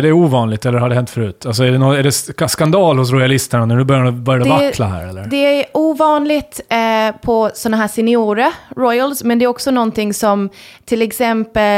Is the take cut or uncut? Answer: uncut